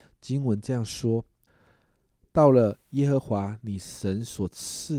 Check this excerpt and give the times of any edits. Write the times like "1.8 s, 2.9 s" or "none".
1.5 s